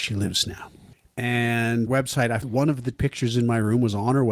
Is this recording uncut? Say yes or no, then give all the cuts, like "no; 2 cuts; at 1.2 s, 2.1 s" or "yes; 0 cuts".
no; 3 cuts; at 1.9 s, 2.4 s, 2.9 s